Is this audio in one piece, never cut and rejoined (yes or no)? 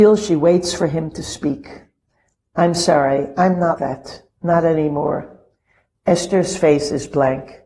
no